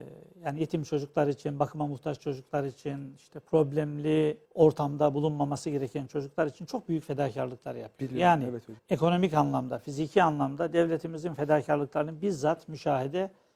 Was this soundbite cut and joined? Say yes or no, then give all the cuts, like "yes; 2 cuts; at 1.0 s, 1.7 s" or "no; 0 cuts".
yes; 2 cuts; at 4.4 s, 8.8 s